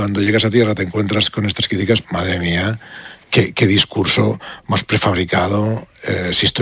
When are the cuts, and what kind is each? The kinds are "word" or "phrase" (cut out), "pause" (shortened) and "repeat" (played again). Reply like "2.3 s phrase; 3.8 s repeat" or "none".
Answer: 2.0 s word; 3.2 s word

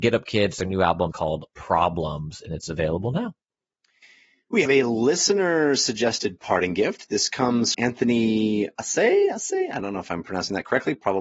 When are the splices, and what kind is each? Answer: 1.1 s word; 4.6 s word; 7.7 s word

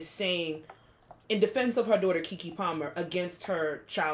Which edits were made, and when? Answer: 1.2 s word

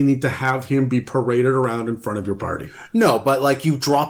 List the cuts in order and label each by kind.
none

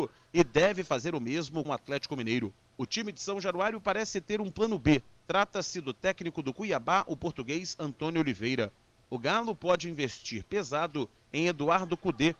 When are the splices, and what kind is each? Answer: 1.6 s word

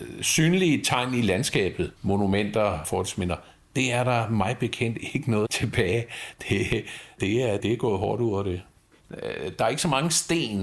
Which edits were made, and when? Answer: 2.0 s pause; 5.4 s word; 7.6 s word

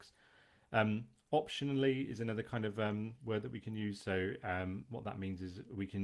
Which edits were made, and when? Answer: none

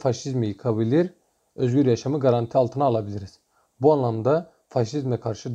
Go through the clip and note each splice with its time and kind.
none

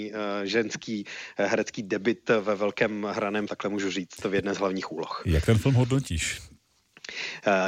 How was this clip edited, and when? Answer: 3.5 s phrase

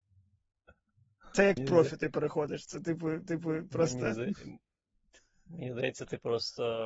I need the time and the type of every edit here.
1.6 s phrase; 3.3 s repeat

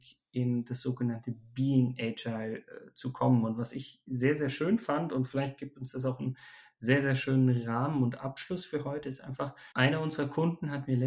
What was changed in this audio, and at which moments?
9.7 s pause

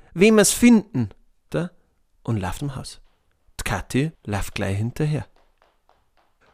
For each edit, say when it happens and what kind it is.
1.5 s word; 2.6 s word; 4.1 s pause

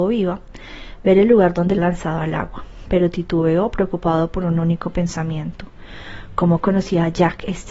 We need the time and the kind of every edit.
1.8 s word

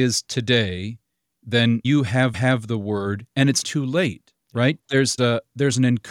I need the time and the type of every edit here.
1.8 s word; 2.3 s repeat; 3.6 s word; 4.4 s pause; 5.2 s word

